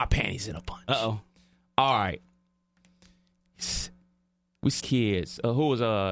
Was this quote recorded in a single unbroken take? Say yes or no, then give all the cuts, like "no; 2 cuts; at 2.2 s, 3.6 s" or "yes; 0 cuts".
no; 1 cut; at 4.8 s